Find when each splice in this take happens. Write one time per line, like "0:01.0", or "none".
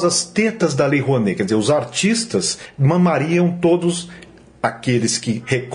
none